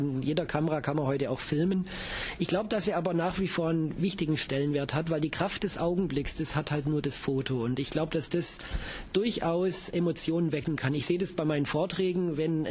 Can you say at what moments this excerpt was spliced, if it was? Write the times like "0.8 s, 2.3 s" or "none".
none

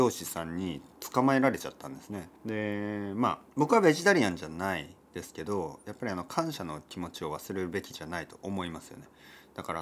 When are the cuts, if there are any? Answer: 2.4 s, 3.5 s

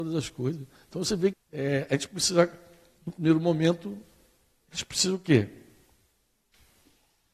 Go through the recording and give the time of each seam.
1.3 s

